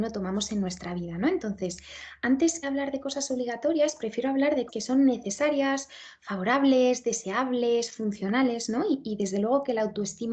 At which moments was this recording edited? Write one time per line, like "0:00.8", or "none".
0:02.6
0:04.7